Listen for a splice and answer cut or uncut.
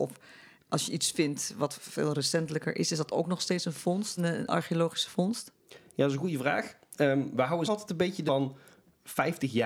cut